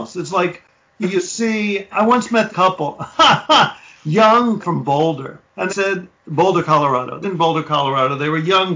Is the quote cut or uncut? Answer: cut